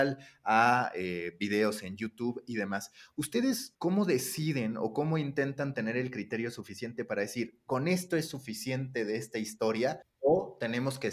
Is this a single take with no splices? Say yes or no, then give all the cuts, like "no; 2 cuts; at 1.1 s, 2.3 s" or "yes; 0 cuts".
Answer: yes; 0 cuts